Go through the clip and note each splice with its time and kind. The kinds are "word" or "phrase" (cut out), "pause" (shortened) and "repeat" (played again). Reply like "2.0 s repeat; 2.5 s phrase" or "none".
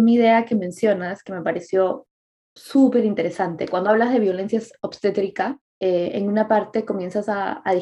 5.7 s pause